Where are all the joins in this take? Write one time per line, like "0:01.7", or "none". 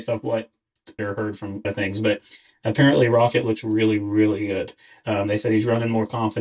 0:01.0
0:01.6